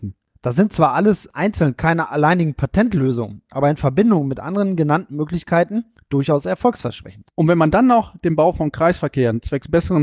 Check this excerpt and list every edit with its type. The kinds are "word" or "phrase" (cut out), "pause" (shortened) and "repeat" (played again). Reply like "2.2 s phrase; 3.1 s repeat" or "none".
none